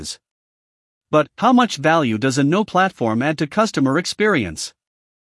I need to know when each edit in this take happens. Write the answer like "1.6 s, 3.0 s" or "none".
2.7 s